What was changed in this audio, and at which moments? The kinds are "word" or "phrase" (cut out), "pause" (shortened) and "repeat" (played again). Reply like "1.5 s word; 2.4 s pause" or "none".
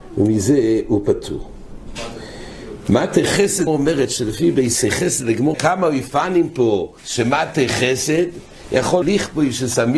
3.7 s word; 4.8 s word; 5.5 s word; 7.0 s pause; 9.0 s phrase